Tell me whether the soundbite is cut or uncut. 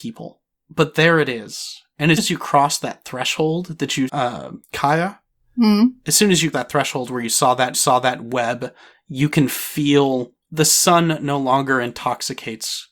cut